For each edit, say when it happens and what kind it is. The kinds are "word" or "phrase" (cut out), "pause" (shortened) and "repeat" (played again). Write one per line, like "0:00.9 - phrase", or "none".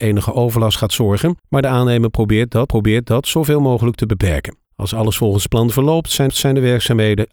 0:01.4 - pause
0:02.7 - repeat
0:04.6 - pause
0:06.3 - repeat